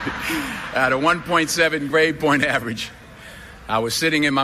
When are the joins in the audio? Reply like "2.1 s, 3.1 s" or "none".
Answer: none